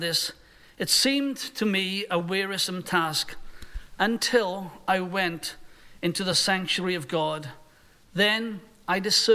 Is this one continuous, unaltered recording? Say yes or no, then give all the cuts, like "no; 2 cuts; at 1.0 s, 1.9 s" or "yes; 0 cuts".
yes; 0 cuts